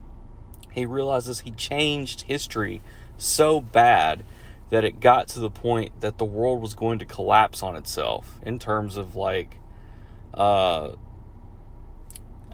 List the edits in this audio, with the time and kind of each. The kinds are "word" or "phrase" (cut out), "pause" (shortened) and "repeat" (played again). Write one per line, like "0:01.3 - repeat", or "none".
none